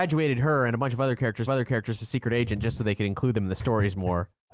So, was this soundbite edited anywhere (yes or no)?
yes